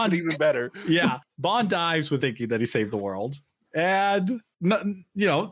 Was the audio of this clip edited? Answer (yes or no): yes